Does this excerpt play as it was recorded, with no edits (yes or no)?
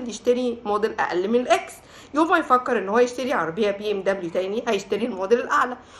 yes